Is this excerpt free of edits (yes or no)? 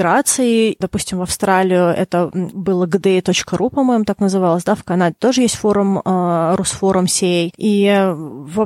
yes